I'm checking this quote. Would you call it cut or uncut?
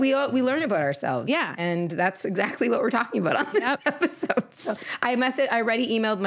uncut